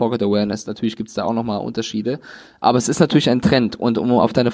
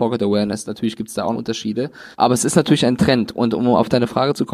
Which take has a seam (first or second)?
second